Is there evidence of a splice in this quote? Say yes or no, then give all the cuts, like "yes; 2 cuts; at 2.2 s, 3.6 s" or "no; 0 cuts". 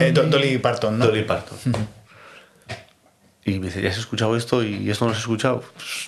no; 0 cuts